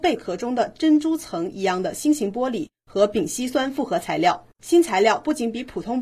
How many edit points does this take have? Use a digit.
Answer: 1